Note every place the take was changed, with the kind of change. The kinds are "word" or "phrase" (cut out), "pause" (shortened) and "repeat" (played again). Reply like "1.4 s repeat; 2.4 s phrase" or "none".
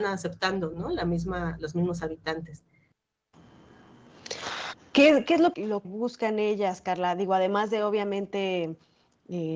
5.5 s word; 5.8 s word

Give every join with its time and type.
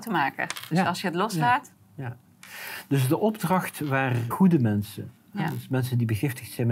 4.3 s word

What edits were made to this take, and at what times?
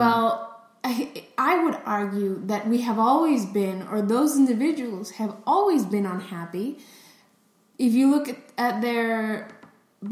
none

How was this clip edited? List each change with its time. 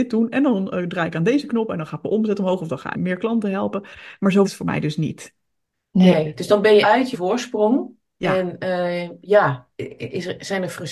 2.9 s word; 4.4 s word; 6.8 s word; 7.1 s word

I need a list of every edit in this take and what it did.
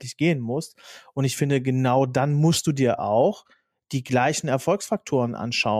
none

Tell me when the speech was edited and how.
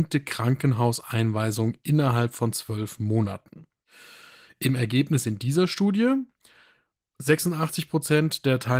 none

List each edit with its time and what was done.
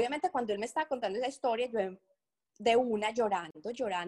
none

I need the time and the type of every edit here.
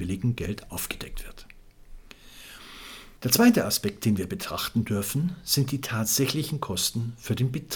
3.2 s pause

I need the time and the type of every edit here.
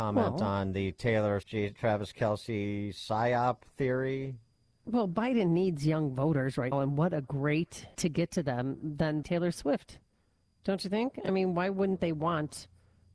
1.4 s word; 1.7 s word; 6.7 s word; 7.9 s word; 9.2 s word

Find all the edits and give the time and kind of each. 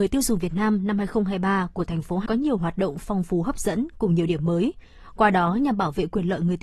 2.3 s word

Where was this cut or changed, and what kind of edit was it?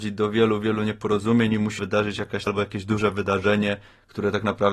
1.8 s word; 2.5 s word

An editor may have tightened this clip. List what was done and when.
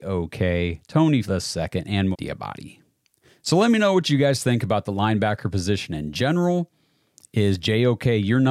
1.2 s word; 2.1 s word

